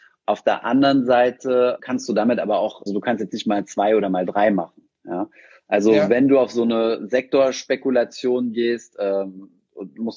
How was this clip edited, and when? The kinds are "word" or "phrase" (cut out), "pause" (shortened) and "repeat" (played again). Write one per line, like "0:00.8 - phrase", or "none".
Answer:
0:01.8 - word
0:02.9 - word